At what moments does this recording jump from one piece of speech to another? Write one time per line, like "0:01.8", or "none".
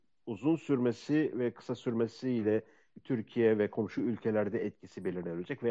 none